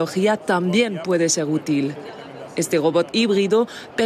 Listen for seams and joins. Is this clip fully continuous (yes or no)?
no